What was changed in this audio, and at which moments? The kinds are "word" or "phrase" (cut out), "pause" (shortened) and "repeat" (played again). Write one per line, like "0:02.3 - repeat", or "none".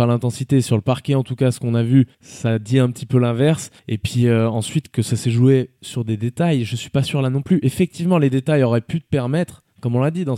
0:02.1 - pause
0:03.8 - pause